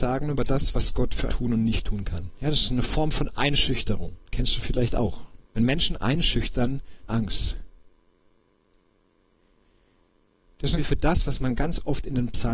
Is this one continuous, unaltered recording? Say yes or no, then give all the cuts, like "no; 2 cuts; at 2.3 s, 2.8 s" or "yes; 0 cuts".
no; 6 cuts; at 1.3 s, 4.2 s, 5.4 s, 5.9 s, 7.1 s, 10.8 s